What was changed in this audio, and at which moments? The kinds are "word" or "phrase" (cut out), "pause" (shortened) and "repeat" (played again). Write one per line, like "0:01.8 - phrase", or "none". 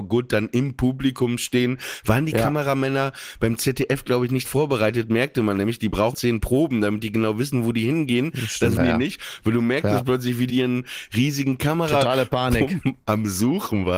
0:04.4 - word
0:06.1 - word
0:08.8 - word
0:10.5 - word

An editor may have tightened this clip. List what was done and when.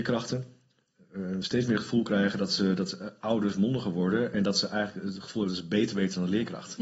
none

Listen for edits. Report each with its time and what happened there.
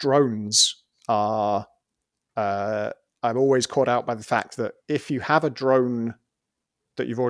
0:03.1 - pause
0:04.8 - pause

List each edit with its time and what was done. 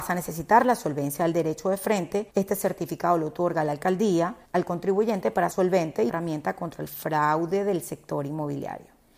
0:02.3 - pause
0:04.4 - pause
0:05.5 - phrase
0:06.1 - phrase

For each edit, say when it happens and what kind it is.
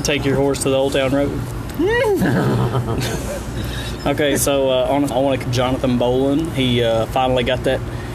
0:05.1 - phrase
0:05.4 - word

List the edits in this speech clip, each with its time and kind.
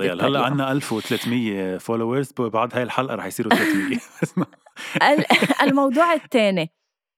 none

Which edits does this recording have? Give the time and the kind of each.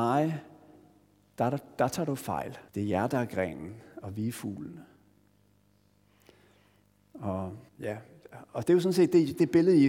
0:02.7 - pause
0:07.7 - pause

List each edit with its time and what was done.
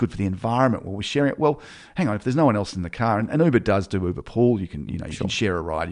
none

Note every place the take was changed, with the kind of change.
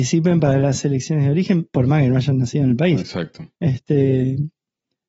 0:03.5 - pause

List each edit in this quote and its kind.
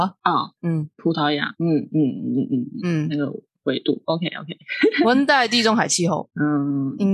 none

